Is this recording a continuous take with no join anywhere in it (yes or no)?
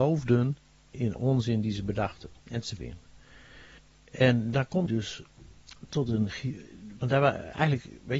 no